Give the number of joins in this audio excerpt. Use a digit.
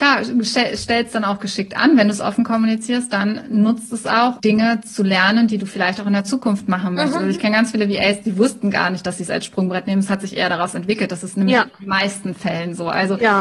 1